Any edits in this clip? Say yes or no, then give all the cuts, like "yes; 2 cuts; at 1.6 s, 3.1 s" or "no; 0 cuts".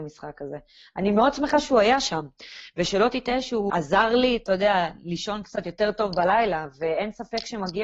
yes; 1 cut; at 3.7 s